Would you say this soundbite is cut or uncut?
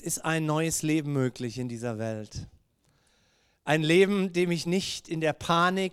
uncut